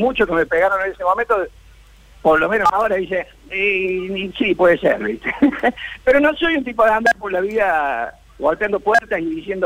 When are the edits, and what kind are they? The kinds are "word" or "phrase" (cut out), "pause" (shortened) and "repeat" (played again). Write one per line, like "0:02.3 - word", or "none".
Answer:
0:03.4 - pause